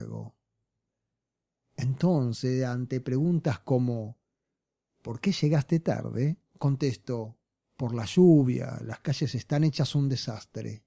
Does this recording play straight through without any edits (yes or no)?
yes